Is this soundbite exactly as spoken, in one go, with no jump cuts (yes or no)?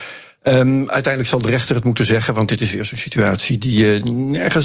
yes